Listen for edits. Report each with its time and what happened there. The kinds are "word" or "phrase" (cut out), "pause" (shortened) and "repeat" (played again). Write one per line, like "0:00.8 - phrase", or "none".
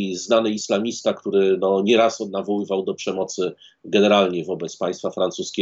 none